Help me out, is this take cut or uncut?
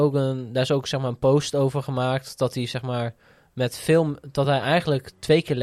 uncut